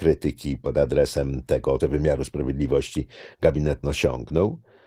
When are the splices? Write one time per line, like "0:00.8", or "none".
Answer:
0:01.8
0:03.8